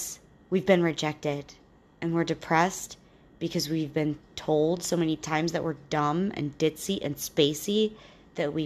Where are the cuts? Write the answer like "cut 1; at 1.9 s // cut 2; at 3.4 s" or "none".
none

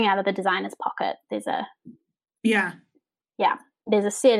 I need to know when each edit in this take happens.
none

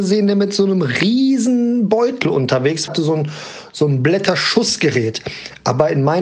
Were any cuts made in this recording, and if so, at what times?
cut 1; at 2.9 s

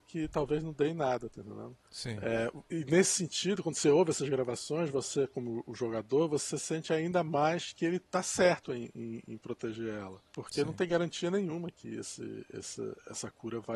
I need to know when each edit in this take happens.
cut 1; at 1.8 s // cut 2; at 8.0 s // cut 3; at 10.3 s

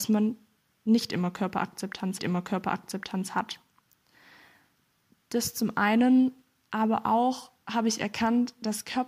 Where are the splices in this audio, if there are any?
cut 1; at 2.2 s

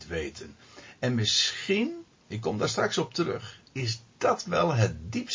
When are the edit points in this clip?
cut 1; at 2.1 s

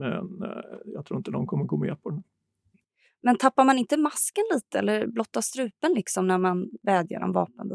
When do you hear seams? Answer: none

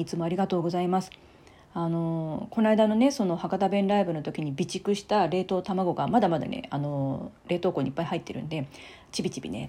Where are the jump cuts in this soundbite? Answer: cut 1; at 7.4 s

